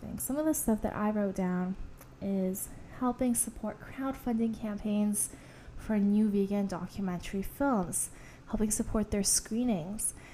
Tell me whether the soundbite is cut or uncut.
uncut